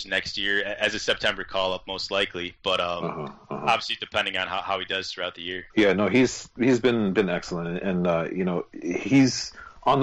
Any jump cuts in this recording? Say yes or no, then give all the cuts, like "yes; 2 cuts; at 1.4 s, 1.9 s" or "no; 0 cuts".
yes; 1 cut; at 5.7 s